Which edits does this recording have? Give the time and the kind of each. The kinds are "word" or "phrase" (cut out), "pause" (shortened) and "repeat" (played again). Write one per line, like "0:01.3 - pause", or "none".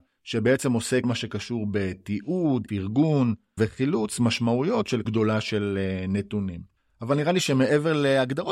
0:01.0 - word
0:02.7 - word
0:03.6 - word
0:05.0 - word